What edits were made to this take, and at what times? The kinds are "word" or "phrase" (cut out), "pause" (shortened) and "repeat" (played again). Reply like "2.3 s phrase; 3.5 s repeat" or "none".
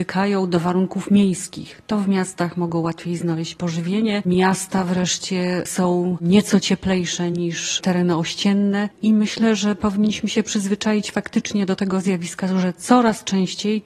none

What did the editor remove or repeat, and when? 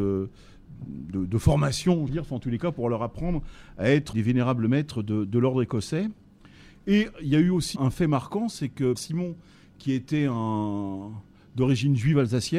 2.1 s word; 4.1 s word; 7.8 s word; 9.0 s word

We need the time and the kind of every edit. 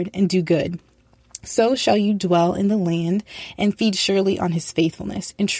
none

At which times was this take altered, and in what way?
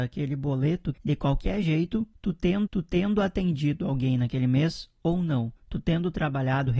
0.9 s phrase; 2.7 s repeat

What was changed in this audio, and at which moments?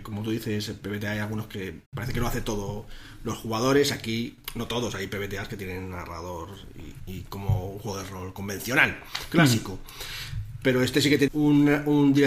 1.9 s pause; 7.0 s word; 11.3 s word

